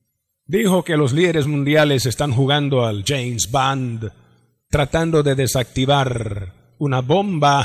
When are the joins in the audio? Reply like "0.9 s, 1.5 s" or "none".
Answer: none